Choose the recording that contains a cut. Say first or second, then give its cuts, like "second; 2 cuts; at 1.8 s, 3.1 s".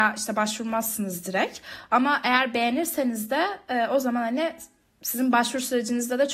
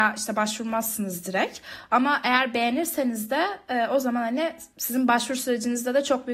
second; 1 cut; at 4.7 s